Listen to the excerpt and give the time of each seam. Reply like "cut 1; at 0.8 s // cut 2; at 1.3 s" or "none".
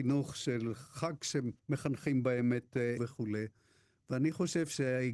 cut 1; at 1.6 s // cut 2; at 3.0 s